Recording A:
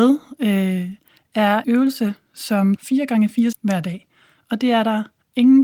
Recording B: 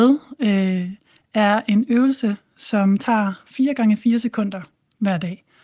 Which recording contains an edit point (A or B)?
A